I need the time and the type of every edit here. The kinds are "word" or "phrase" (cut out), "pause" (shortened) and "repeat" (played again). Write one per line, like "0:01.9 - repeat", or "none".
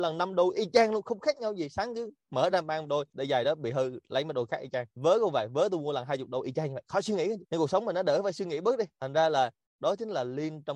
none